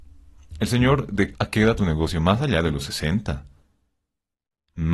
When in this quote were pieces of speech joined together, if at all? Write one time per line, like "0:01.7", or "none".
0:01.3
0:01.8